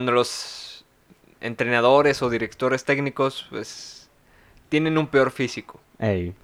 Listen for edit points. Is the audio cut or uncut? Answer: uncut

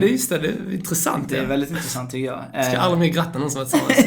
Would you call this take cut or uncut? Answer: uncut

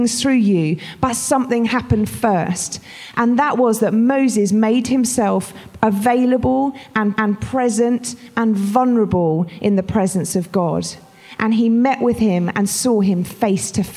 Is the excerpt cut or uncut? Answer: cut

